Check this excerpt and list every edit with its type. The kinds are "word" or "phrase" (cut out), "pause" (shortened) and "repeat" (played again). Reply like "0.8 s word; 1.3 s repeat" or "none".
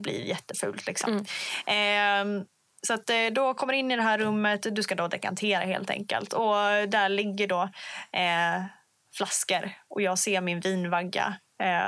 none